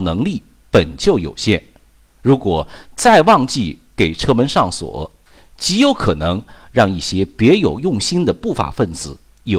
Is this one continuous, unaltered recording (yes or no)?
yes